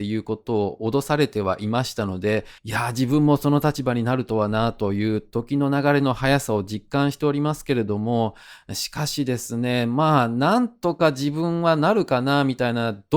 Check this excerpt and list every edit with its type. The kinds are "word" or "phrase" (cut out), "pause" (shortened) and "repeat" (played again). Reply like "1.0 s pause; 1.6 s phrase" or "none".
2.6 s pause